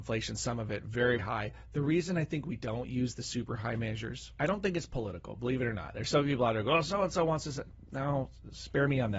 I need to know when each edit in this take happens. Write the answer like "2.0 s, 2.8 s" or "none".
1.2 s, 4.3 s